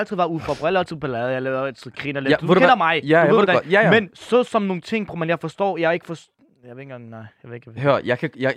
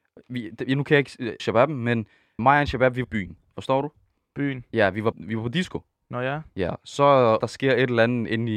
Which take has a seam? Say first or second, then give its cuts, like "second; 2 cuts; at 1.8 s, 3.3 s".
second; 5 cuts; at 1.4 s, 2.4 s, 3.0 s, 5.1 s, 7.4 s